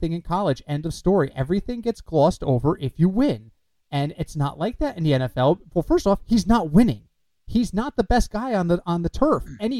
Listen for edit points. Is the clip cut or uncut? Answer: uncut